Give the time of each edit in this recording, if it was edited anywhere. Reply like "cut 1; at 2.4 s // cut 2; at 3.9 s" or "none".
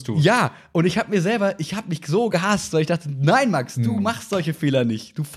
none

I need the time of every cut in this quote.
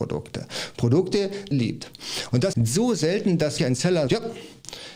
cut 1; at 1.5 s // cut 2; at 2.5 s // cut 3; at 3.6 s // cut 4; at 4.1 s

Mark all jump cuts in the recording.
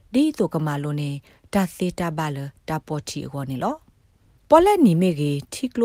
none

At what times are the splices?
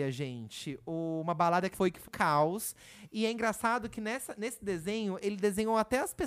cut 1; at 1.7 s // cut 2; at 2.1 s

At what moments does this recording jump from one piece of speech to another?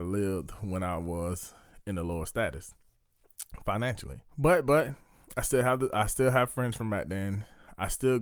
cut 1; at 4.3 s

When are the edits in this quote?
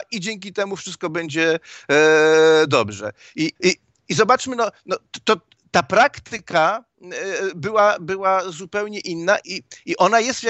cut 1; at 3.6 s // cut 2; at 9.4 s

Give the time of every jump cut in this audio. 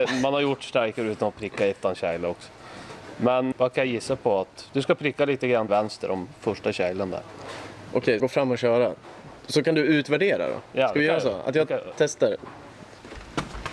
cut 1; at 3.5 s // cut 2; at 5.7 s // cut 3; at 8.2 s

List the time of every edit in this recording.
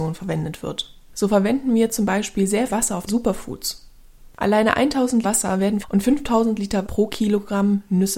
cut 1; at 2.7 s // cut 2; at 3.1 s // cut 3; at 5.2 s // cut 4; at 5.8 s // cut 5; at 6.8 s

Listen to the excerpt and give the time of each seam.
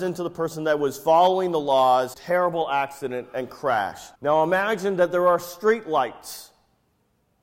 cut 1; at 2.1 s // cut 2; at 4.1 s

